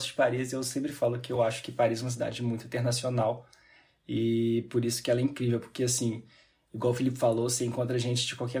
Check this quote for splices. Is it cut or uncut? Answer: uncut